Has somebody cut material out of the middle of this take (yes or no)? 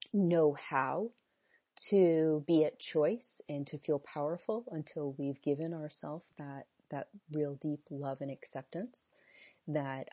no